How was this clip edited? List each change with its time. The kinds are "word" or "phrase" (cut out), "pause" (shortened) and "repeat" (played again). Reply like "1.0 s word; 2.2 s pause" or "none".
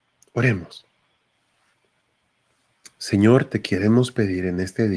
none